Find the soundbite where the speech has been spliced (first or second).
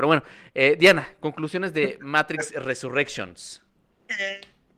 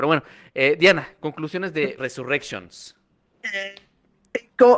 second